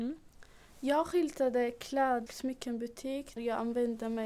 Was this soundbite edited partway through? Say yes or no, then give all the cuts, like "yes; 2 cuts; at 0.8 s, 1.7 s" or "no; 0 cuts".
yes; 2 cuts; at 2.3 s, 3.4 s